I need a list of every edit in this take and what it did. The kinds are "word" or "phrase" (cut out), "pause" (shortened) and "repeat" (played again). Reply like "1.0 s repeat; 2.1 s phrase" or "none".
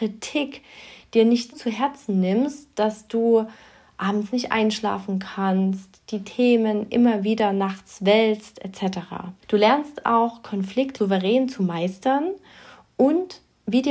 1.5 s word